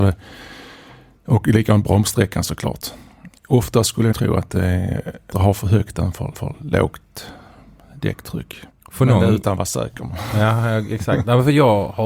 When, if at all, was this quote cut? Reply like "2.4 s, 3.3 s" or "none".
3.4 s, 4.1 s, 5.3 s, 6.3 s, 8.7 s